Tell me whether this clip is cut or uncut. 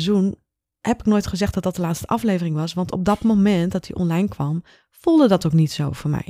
uncut